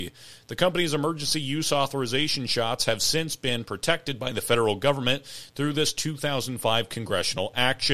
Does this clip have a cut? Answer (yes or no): no